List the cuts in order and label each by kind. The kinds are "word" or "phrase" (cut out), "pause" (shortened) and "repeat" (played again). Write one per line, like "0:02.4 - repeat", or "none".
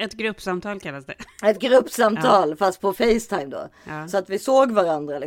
none

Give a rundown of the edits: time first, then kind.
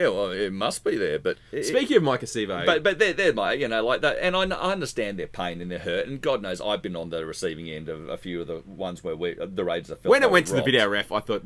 none

